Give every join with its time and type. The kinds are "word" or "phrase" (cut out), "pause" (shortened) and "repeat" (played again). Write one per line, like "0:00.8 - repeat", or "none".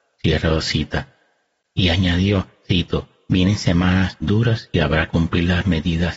0:02.6 - word
0:04.2 - word
0:05.1 - word